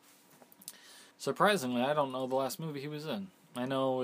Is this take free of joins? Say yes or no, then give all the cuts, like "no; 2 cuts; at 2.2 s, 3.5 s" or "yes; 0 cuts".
no; 1 cut; at 1.1 s